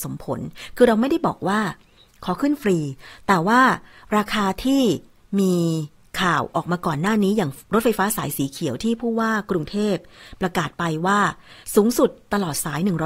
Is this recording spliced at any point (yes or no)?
no